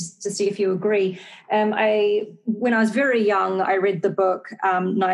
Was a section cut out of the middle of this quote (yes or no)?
no